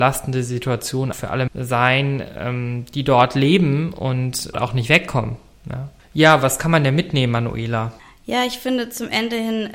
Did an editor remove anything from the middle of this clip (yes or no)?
yes